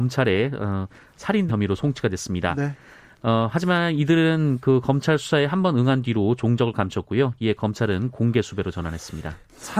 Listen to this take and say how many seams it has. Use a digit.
1